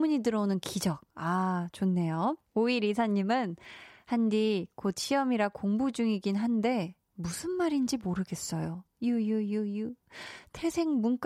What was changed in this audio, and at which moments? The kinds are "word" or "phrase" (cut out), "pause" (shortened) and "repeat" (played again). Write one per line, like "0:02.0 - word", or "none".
0:02.5 - pause
0:07.0 - pause